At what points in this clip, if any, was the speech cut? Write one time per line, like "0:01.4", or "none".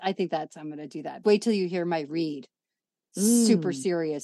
0:01.2